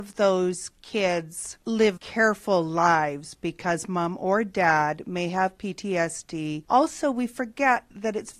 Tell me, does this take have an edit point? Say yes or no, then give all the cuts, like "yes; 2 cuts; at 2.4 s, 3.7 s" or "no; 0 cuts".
yes; 1 cut; at 2.0 s